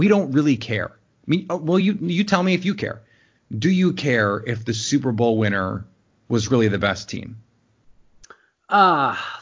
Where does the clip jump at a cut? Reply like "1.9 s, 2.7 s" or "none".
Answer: none